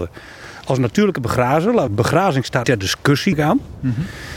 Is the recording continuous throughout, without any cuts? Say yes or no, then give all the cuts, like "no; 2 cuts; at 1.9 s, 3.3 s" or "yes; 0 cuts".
no; 3 cuts; at 1.9 s, 2.6 s, 3.3 s